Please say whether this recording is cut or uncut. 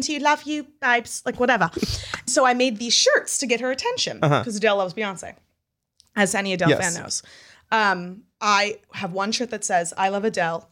cut